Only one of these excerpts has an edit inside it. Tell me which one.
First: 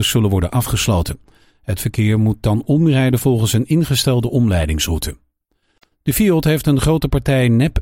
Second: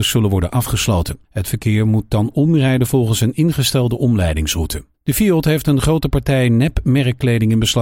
second; 2 cuts; at 1.2 s, 4.9 s

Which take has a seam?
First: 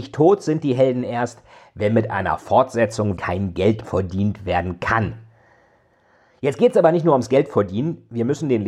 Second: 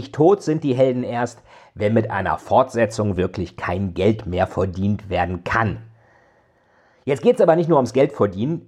first; 2 cuts; at 3.2 s, 3.8 s

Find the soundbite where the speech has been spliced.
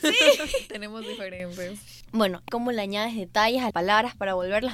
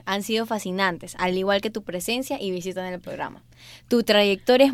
first; 2 cuts; at 2.5 s, 3.7 s

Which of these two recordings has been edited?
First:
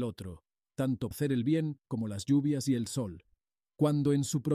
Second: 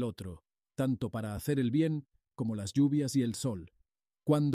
first; 2 cuts; at 1.1 s, 1.9 s

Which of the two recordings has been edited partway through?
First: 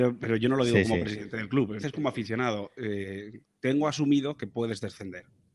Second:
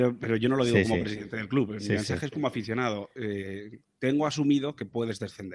first; 1 cut; at 1.8 s

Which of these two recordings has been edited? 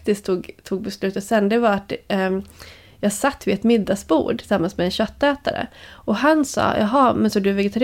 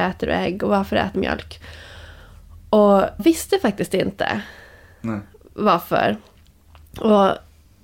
second; 2 cuts; at 1.1 s, 3.2 s

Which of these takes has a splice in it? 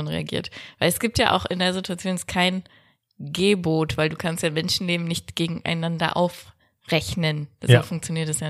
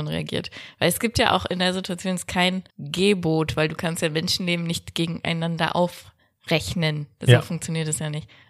second; 1 cut; at 2.7 s

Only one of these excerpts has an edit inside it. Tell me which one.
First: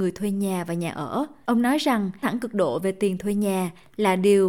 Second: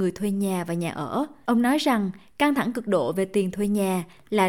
first; 1 cut; at 2.2 s

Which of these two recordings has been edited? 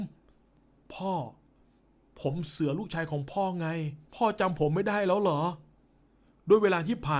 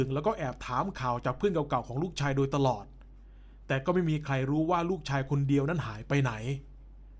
first; 1 cut; at 4.1 s

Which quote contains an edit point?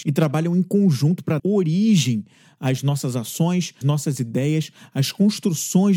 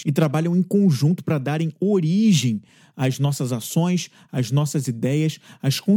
first; 2 cuts; at 1.4 s, 3.8 s

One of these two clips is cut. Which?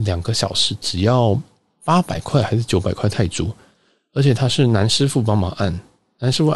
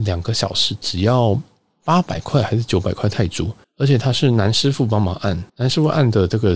second; 2 cuts; at 3.6 s, 5.5 s

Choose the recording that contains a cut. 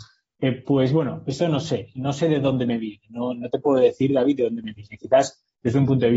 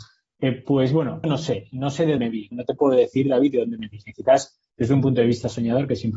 second; 3 cuts; at 1.2 s, 2.2 s, 2.5 s

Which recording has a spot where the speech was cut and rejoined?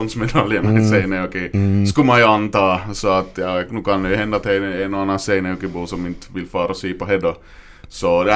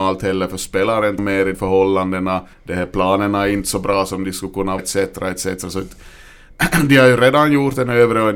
second; 4 cuts; at 1.2 s, 1.5 s, 2.5 s, 4.8 s

